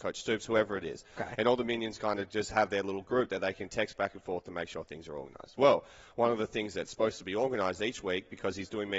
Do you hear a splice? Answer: no; 0 cuts

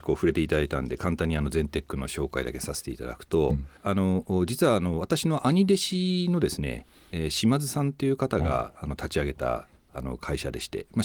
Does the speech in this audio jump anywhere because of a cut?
yes; 1 cut; at 3.8 s

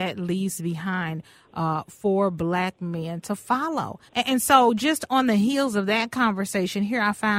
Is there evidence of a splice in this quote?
yes; 1 cut; at 4.1 s

